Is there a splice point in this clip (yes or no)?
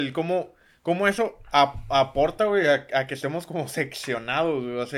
no